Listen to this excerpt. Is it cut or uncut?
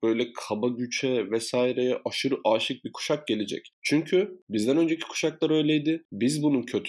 uncut